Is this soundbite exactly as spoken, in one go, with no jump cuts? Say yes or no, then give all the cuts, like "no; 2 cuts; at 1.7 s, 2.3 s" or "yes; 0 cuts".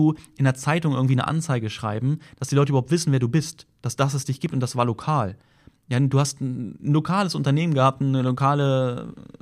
yes; 0 cuts